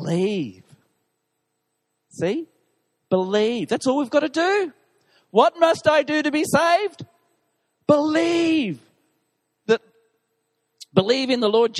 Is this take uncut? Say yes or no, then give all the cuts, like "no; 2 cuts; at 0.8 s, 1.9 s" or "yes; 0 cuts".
yes; 0 cuts